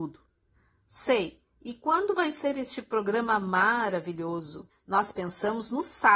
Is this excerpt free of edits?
no; 1 cut; at 4.7 s

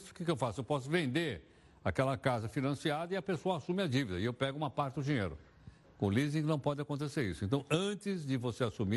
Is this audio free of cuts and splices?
yes; 0 cuts

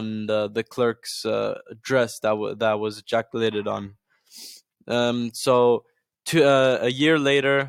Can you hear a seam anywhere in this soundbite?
no; 0 cuts

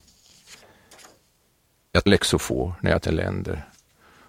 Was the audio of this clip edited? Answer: yes; 2 cuts; at 2.1 s, 3.1 s

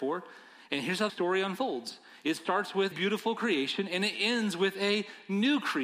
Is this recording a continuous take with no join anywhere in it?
no; 2 cuts; at 1.1 s, 2.9 s

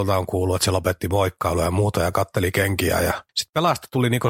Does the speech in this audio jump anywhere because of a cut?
no; 0 cuts

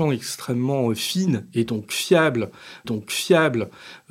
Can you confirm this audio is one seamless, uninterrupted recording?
no; 1 cut; at 2.8 s

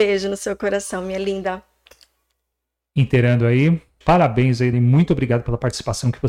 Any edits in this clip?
yes; 2 cuts; at 4.0 s, 4.7 s

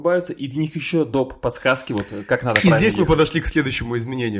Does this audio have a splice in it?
no; 0 cuts

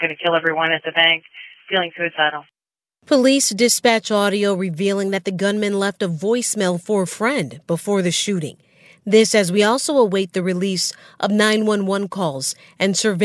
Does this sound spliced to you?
no; 0 cuts

